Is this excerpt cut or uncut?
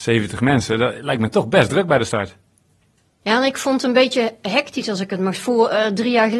uncut